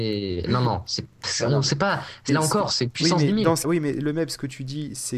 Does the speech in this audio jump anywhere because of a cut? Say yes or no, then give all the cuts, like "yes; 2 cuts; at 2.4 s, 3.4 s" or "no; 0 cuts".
yes; 2 cuts; at 2.3 s, 3.6 s